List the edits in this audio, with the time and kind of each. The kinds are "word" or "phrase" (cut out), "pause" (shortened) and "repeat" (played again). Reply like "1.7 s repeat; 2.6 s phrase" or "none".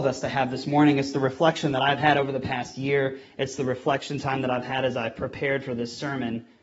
none